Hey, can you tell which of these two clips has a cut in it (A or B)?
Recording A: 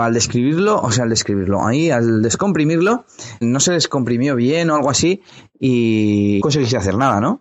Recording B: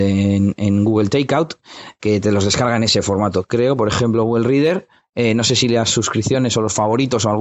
A